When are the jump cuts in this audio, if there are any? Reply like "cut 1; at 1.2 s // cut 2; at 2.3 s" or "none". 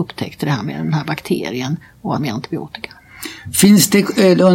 cut 1; at 2.2 s